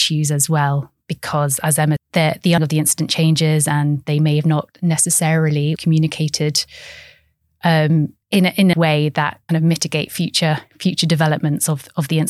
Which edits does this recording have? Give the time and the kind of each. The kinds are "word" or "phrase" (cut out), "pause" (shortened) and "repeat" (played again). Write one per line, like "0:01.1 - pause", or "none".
0:01.0 - pause
0:02.0 - word
0:02.6 - word
0:05.8 - word
0:08.2 - pause
0:08.7 - phrase
0:09.5 - phrase

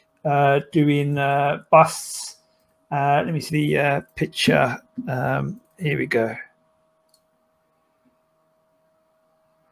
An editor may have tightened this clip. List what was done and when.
0:03.5 - phrase

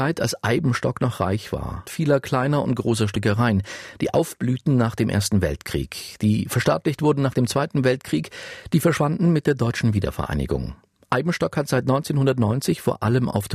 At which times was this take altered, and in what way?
0:01.9 - word

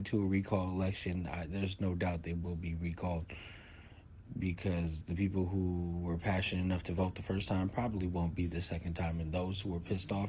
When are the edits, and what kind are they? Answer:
none

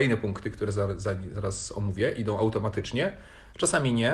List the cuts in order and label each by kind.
none

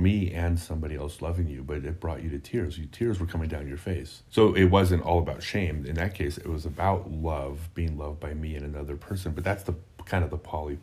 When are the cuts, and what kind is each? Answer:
0:04.3 - pause

